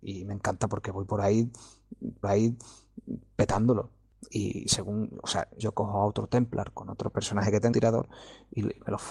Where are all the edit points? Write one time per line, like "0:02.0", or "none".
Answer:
0:02.2
0:05.6
0:07.7